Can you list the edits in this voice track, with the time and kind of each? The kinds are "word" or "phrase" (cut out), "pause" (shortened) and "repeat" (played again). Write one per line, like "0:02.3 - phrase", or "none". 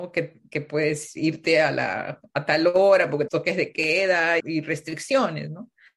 0:03.3 - phrase
0:04.4 - word